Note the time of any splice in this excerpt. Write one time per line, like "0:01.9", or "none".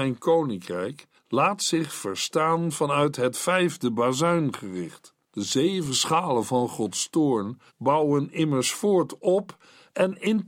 0:01.2
0:05.2
0:07.7

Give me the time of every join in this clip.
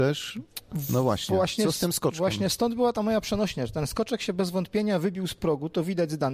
none

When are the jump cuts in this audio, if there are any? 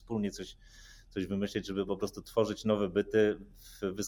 none

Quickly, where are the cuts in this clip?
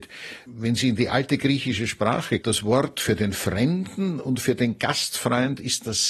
0:02.4

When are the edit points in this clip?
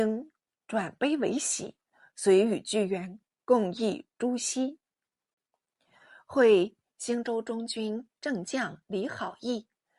0:08.2

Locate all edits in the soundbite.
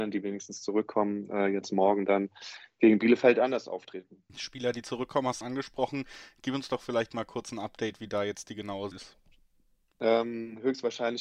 0:04.3
0:05.4
0:08.9

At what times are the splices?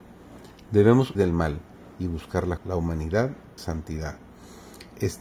0:01.1
0:02.6
0:03.6

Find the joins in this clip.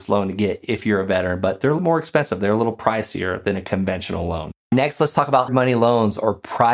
0:01.8
0:05.5

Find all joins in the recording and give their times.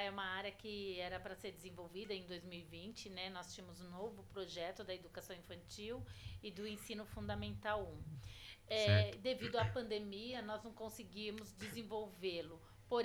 none

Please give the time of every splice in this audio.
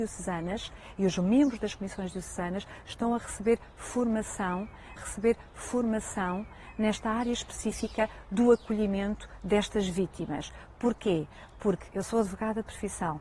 0:05.0
0:11.9

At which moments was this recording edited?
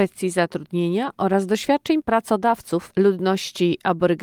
none

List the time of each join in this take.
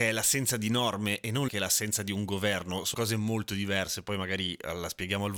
0:01.5
0:02.9

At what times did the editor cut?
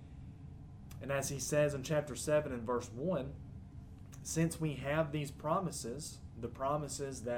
none

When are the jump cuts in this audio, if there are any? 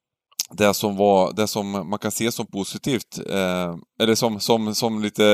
0:03.9

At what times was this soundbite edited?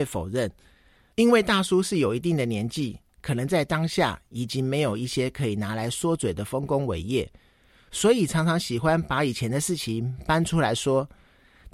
none

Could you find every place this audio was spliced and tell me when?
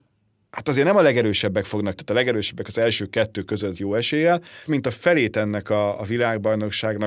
0:02.0
0:03.7
0:04.7

